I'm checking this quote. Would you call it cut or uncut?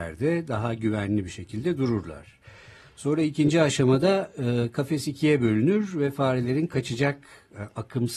uncut